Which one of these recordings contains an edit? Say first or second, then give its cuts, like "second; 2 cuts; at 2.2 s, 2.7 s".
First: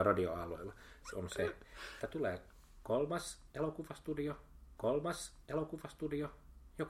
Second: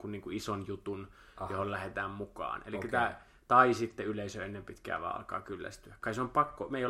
first; 3 cuts; at 1.1 s, 2.0 s, 4.8 s